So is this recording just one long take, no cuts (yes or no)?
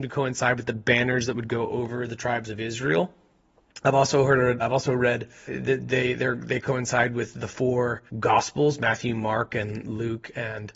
no